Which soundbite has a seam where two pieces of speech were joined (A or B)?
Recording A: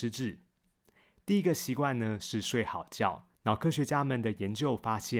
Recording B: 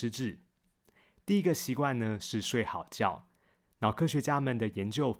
A